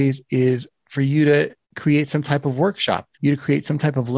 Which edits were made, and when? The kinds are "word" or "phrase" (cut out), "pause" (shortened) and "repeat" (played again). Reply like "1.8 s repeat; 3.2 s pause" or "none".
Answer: 1.6 s pause; 3.1 s pause